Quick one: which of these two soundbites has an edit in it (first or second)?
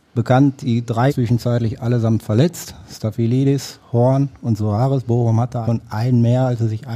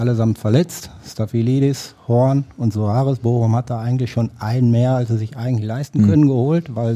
first